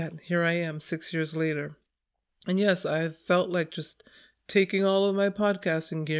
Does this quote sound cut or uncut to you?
uncut